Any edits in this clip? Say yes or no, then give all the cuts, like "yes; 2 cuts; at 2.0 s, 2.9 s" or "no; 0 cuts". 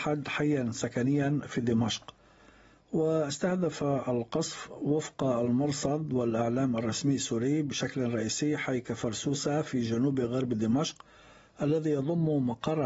no; 0 cuts